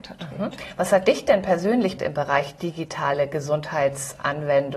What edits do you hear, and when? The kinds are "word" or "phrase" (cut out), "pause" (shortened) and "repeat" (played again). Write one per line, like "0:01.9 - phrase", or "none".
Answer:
0:02.0 - word